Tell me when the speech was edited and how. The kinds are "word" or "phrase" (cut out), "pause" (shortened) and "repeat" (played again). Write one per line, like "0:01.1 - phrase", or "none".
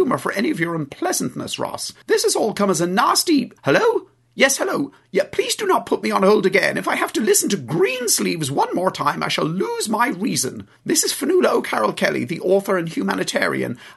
0:02.0 - pause
0:03.6 - pause
0:10.8 - pause